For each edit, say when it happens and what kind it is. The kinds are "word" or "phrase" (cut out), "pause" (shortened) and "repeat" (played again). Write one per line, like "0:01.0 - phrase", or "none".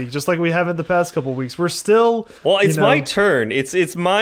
0:02.4 - pause